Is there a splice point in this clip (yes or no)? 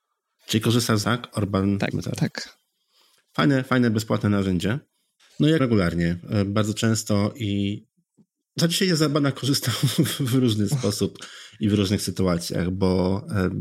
yes